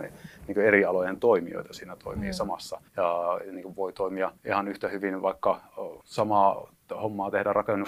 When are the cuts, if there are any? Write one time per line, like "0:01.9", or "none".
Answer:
0:02.9
0:04.4
0:06.0